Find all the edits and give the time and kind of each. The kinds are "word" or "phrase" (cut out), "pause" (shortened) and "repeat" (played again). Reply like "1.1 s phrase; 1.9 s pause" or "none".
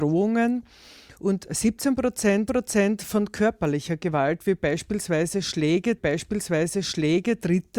2.5 s repeat; 6.0 s repeat